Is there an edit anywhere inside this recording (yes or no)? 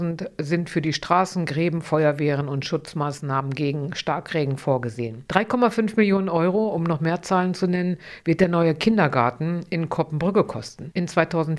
no